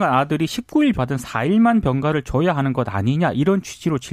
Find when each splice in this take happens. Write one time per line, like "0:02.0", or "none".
0:00.9